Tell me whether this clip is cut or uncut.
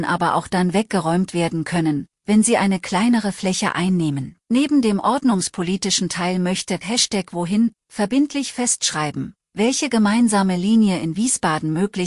cut